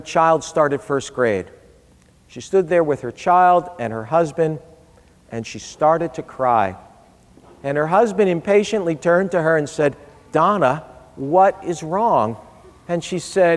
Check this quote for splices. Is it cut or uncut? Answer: uncut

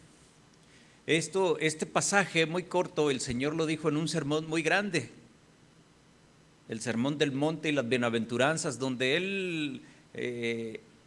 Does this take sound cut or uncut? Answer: uncut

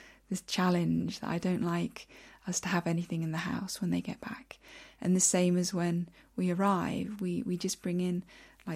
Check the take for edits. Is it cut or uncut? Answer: uncut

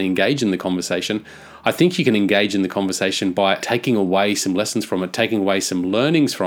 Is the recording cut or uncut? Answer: cut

